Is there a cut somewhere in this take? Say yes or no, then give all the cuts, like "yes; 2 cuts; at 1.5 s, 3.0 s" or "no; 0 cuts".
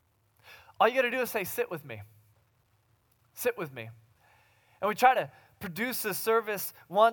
no; 0 cuts